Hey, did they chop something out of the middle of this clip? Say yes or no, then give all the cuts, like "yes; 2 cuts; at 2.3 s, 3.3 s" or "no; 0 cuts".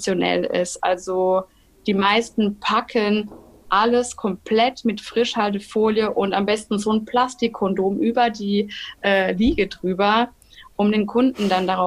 no; 0 cuts